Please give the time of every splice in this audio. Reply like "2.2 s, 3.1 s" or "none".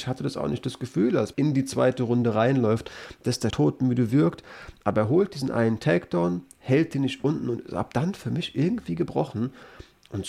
1.3 s, 3.5 s